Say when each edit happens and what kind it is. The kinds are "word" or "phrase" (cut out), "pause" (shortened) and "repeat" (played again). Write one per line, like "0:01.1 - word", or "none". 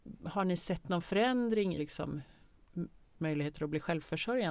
0:01.8 - word
0:03.2 - word